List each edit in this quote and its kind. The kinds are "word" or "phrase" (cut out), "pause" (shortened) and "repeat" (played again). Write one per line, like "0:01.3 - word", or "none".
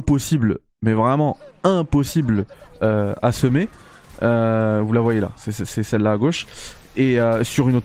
none